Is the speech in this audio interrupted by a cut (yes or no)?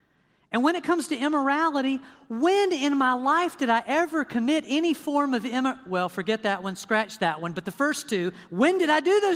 no